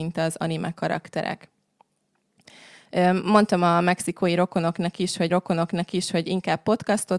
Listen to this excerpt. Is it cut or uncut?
cut